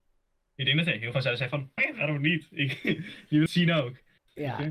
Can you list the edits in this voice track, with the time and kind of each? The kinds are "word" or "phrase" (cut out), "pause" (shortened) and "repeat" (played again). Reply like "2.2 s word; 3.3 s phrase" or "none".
1.1 s word; 1.8 s word; 3.5 s phrase